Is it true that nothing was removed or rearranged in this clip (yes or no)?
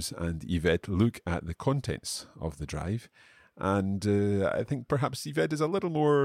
yes